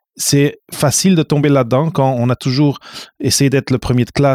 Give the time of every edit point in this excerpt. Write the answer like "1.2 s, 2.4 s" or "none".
none